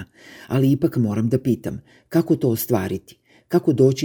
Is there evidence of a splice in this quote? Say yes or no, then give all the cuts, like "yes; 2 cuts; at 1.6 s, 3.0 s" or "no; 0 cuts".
no; 0 cuts